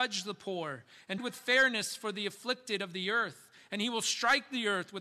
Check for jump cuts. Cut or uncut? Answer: cut